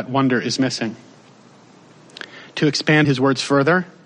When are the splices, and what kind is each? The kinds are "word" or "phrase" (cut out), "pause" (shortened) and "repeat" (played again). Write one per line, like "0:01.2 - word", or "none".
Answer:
0:03.0 - word